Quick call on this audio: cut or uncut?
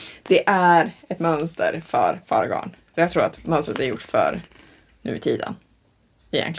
uncut